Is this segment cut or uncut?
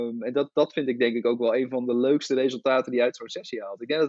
uncut